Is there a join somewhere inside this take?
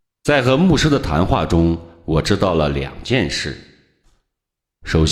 no; 0 cuts

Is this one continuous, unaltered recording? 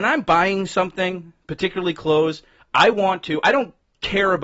yes; 0 cuts

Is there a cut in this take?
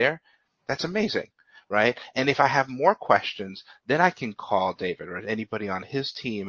no; 0 cuts

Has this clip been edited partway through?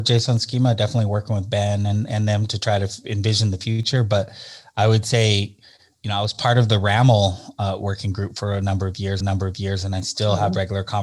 yes; 1 cut; at 9.2 s

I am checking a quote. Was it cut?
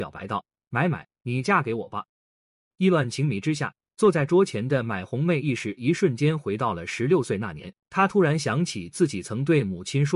yes; 2 cuts; at 2.1 s, 7.8 s

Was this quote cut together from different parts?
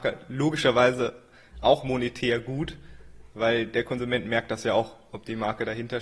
no; 0 cuts

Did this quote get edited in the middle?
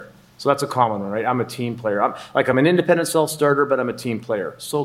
no; 0 cuts

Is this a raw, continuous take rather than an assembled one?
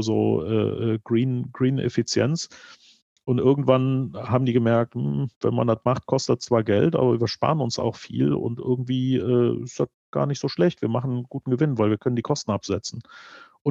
yes; 0 cuts

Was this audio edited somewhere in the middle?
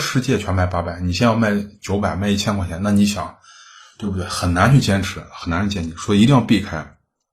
no; 0 cuts

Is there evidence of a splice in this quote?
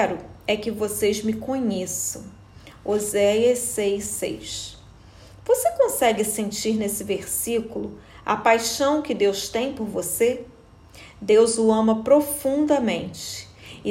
no; 0 cuts

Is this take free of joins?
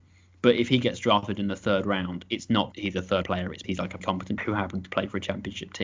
no; 5 cuts; at 2.7 s, 3.2 s, 3.6 s, 4.0 s, 4.4 s

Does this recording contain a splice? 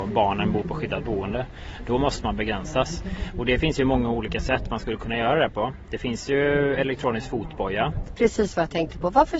no; 0 cuts

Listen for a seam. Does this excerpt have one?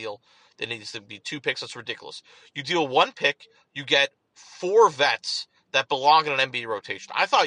no; 0 cuts

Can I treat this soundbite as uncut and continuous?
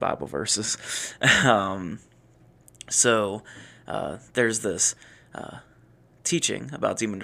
yes; 0 cuts

